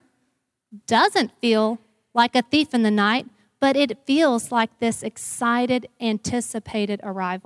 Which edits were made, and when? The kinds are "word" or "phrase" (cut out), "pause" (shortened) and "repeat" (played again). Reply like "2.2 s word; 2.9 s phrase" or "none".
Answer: none